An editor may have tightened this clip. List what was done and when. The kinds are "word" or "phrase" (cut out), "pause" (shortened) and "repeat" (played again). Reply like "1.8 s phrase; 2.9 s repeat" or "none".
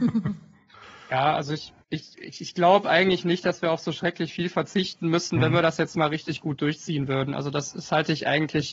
1.8 s pause